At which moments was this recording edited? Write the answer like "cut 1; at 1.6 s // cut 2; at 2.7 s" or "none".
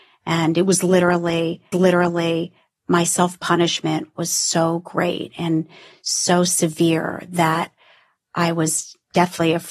cut 1; at 1.7 s